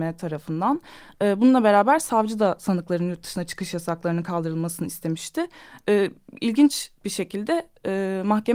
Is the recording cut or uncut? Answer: uncut